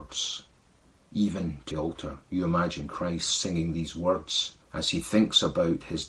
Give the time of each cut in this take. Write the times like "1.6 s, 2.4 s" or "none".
1.7 s, 4.6 s

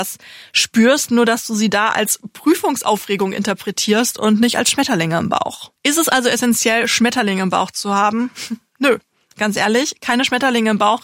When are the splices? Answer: 5.8 s, 9.3 s

